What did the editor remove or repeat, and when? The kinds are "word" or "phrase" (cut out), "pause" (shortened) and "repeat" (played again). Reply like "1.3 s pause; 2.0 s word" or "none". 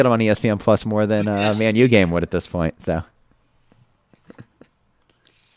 none